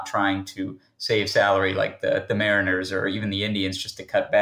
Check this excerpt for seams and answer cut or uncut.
uncut